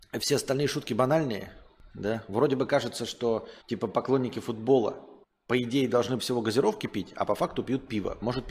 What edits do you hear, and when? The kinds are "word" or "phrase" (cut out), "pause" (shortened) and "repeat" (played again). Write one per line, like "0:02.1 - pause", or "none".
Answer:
0:01.9 - pause
0:03.6 - pause
0:05.2 - pause
0:06.2 - word